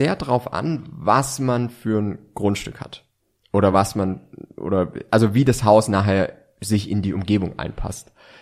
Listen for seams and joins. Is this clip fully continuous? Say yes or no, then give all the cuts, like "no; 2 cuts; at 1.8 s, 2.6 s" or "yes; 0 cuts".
yes; 0 cuts